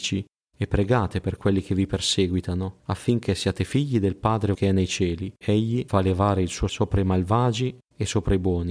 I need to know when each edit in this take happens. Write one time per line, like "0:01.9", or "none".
0:02.8
0:04.5
0:05.4
0:06.7